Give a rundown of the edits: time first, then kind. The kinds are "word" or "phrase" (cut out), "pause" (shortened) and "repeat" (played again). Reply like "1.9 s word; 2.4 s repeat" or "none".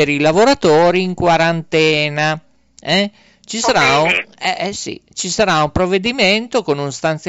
none